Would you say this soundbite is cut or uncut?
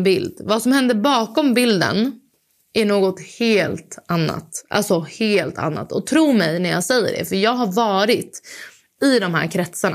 uncut